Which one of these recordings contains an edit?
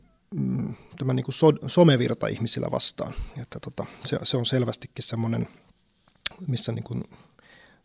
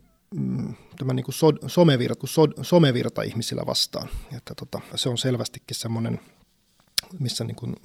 second; 2 cuts; at 2.2 s, 4.9 s

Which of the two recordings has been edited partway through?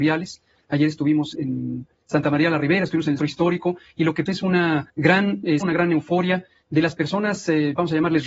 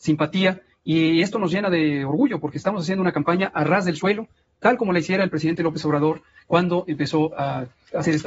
first; 5 cuts; at 1.3 s, 3.2 s, 4.3 s, 4.9 s, 5.6 s

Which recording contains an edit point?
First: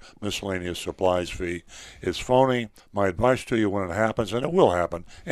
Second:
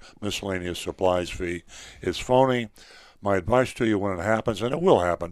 first; 1 cut; at 2.8 s

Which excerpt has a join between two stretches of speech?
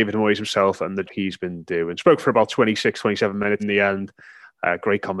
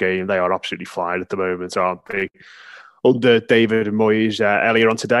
first; 2 cuts; at 1.1 s, 3.6 s

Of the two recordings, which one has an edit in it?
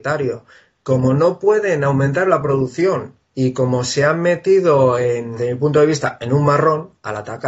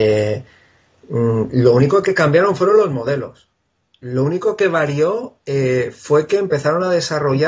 first; 1 cut; at 3.2 s

